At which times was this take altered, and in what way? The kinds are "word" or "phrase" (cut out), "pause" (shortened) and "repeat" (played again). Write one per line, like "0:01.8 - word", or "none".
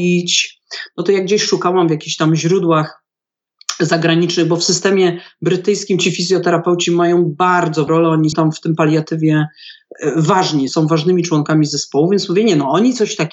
0:07.9 - word
0:08.3 - word
0:10.7 - word